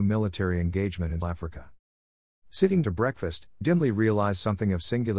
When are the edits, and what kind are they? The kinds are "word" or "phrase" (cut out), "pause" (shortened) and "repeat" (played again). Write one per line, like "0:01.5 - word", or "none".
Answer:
0:01.2 - word
0:02.8 - word
0:03.6 - word